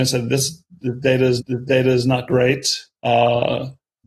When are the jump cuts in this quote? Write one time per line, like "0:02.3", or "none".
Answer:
0:01.4
0:02.9